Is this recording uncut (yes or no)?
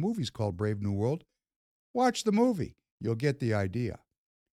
yes